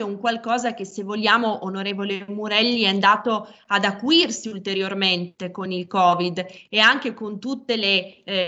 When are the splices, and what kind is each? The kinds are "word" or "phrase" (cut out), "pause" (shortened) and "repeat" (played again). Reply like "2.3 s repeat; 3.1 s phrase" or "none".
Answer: none